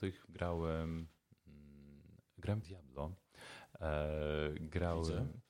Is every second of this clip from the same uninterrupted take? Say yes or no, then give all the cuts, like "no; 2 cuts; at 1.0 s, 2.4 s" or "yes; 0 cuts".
no; 1 cut; at 2.6 s